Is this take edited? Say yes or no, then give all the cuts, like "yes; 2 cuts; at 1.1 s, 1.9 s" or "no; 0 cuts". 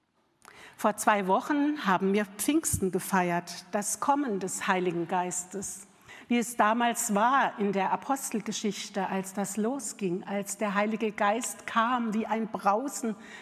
no; 0 cuts